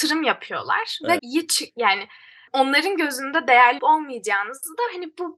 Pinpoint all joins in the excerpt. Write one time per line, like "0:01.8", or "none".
0:01.2
0:02.5
0:03.8